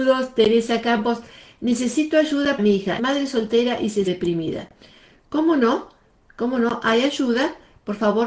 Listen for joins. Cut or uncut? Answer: cut